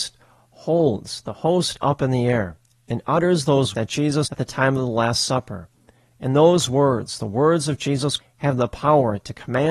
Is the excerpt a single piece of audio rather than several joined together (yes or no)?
no